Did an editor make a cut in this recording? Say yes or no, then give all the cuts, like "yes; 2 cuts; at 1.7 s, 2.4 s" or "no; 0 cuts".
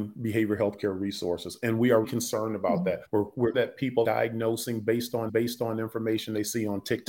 yes; 5 cuts; at 2.0 s, 3.0 s, 3.5 s, 4.0 s, 5.3 s